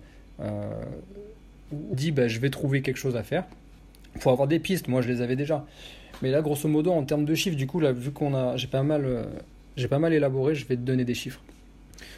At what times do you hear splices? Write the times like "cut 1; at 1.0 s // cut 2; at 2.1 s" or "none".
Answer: cut 1; at 1.9 s